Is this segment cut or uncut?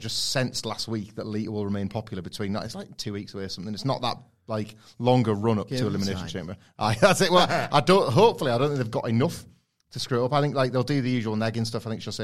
uncut